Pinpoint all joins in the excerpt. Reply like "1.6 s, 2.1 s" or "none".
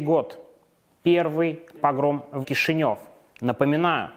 1.8 s, 2.4 s